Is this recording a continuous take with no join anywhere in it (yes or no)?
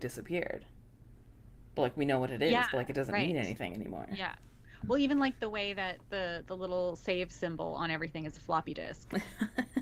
yes